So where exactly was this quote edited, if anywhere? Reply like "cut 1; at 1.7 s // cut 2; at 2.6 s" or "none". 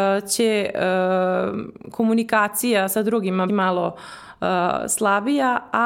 cut 1; at 3.5 s

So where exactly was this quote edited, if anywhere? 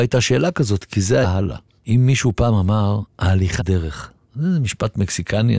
cut 1; at 1.2 s // cut 2; at 3.6 s

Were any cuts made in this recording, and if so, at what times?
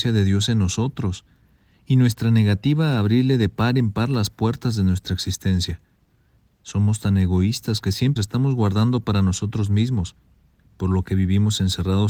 cut 1; at 8.2 s

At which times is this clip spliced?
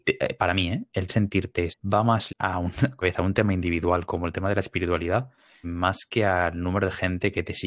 cut 1; at 1.1 s // cut 2; at 1.7 s // cut 3; at 2.3 s // cut 4; at 3.0 s // cut 5; at 5.6 s

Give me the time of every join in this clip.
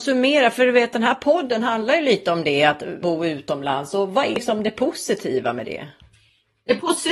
cut 1; at 3.0 s

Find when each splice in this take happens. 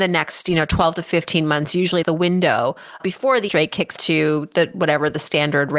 cut 1; at 2.0 s // cut 2; at 3.0 s // cut 3; at 3.5 s // cut 4; at 4.0 s

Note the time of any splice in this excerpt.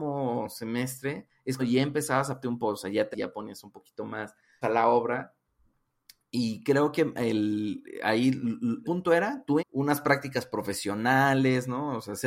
cut 1; at 1.6 s // cut 2; at 2.4 s // cut 3; at 3.1 s // cut 4; at 4.6 s // cut 5; at 8.8 s // cut 6; at 9.6 s

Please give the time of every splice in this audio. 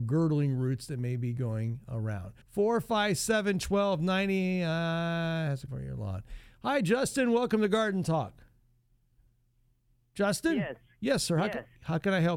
cut 1; at 2.4 s // cut 2; at 5.7 s

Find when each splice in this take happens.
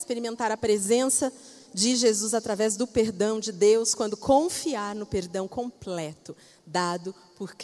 none

